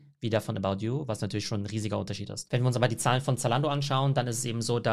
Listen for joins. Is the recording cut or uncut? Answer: uncut